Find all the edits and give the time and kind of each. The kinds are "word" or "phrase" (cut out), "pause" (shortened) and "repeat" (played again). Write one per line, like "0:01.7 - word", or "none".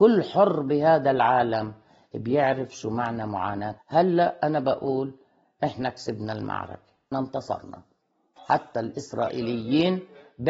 0:03.8 - word
0:07.1 - word